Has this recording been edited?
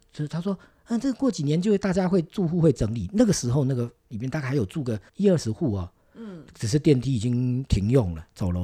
yes; 1 cut; at 5.1 s

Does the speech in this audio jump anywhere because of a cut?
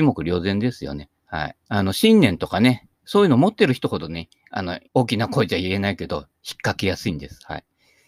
yes; 2 cuts; at 1.6 s, 4.9 s

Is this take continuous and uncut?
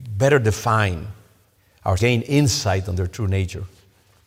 no; 1 cut; at 2.0 s

